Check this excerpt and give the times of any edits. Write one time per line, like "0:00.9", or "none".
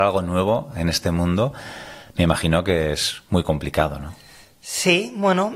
none